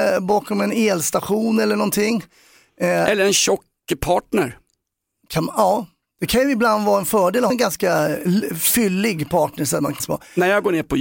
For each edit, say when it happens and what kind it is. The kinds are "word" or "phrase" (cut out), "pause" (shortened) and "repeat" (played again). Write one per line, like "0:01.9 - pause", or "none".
0:07.5 - word
0:10.0 - word